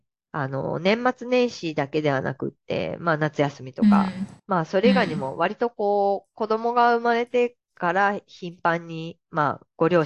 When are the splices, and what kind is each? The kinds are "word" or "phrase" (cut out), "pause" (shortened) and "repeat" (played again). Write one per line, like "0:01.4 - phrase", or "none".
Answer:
0:04.4 - pause
0:07.6 - pause